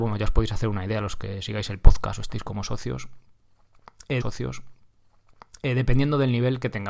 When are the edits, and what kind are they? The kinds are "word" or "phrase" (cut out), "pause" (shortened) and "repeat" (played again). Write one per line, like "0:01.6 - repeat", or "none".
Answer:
0:04.2 - repeat